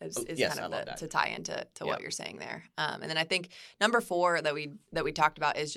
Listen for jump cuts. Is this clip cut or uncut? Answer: uncut